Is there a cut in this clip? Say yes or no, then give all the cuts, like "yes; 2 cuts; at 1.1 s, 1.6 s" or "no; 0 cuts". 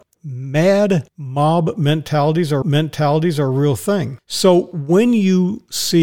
yes; 1 cut; at 2.6 s